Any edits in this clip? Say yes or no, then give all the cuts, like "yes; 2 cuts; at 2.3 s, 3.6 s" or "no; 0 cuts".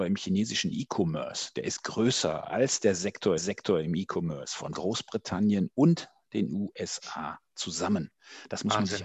yes; 2 cuts; at 3.4 s, 4.7 s